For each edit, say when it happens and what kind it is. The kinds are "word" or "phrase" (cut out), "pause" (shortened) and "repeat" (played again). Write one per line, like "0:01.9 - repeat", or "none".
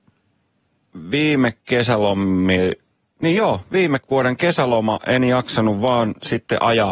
0:01.6 - pause
0:04.0 - pause